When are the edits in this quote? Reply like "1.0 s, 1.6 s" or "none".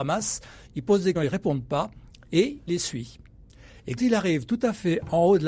1.2 s, 2.7 s, 4.0 s